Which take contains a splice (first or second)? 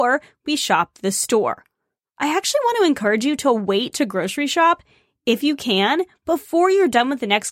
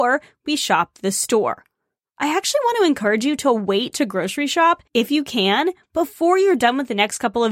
second